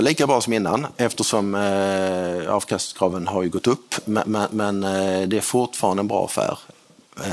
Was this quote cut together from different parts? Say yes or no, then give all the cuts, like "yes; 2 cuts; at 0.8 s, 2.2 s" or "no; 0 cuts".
no; 0 cuts